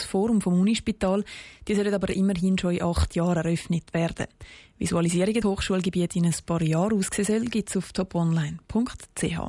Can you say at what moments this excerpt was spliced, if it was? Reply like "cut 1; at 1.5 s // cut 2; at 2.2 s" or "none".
cut 1; at 5.4 s